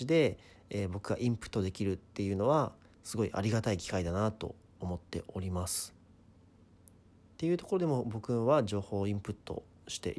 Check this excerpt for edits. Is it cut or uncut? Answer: uncut